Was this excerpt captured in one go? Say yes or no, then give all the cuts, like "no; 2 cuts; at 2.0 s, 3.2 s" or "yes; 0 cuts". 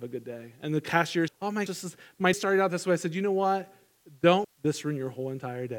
no; 4 cuts; at 1.3 s, 1.7 s, 2.3 s, 4.4 s